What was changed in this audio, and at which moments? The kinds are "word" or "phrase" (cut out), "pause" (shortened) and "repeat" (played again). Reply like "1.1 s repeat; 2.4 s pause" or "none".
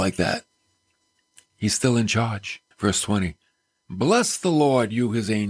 2.7 s pause